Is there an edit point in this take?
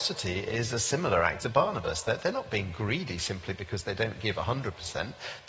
yes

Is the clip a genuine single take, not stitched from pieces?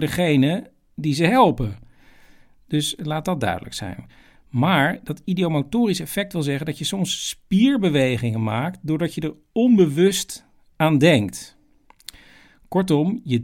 yes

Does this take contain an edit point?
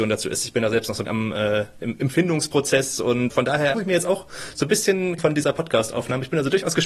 yes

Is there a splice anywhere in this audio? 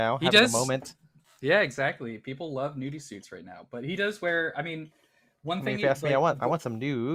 no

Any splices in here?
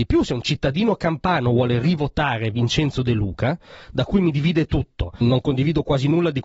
yes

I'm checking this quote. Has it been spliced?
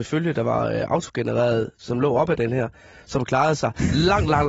no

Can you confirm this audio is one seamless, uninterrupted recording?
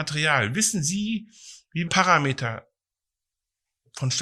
no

